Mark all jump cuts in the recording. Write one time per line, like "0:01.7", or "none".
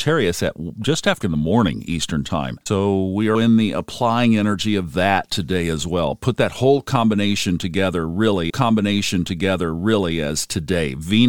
0:01.2
0:02.6
0:03.3
0:08.5